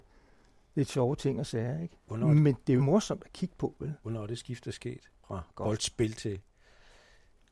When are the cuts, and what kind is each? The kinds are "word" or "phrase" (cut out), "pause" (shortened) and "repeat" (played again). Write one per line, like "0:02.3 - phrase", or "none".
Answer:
0:02.8 - phrase
0:05.2 - pause